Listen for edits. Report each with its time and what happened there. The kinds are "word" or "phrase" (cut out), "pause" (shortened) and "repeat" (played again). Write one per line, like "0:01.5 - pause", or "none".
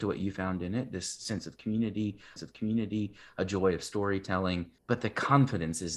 0:02.4 - repeat
0:04.8 - pause